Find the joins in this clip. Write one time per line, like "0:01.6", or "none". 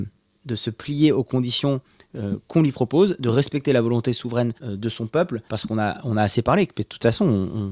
0:04.6
0:05.5